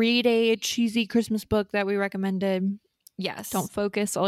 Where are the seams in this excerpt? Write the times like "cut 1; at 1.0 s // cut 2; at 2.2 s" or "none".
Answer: none